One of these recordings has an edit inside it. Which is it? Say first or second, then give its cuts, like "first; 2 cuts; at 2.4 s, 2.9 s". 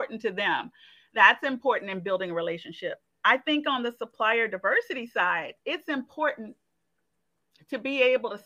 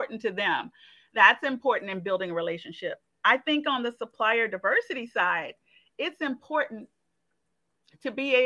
first; 1 cut; at 5.6 s